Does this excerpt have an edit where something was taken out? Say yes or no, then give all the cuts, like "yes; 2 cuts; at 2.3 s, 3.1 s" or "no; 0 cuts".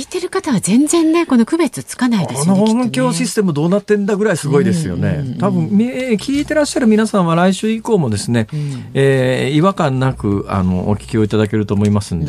no; 0 cuts